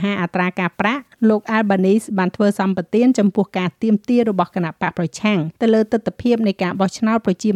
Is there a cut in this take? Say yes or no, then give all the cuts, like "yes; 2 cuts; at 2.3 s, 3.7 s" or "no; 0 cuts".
yes; 1 cut; at 5.6 s